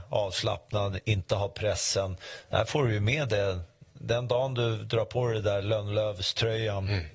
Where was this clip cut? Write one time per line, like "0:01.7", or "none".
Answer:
none